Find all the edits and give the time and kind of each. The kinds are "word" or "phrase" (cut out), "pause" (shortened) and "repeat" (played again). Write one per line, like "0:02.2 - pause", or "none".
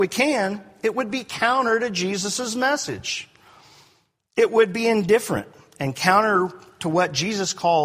none